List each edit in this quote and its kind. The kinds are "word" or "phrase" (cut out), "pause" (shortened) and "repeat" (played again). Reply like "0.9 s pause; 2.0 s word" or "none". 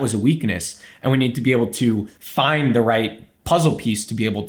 2.1 s pause